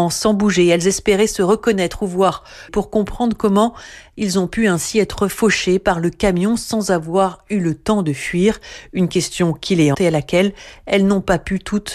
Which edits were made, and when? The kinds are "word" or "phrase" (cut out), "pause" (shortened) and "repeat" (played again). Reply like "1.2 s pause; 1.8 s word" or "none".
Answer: 2.7 s phrase; 9.9 s word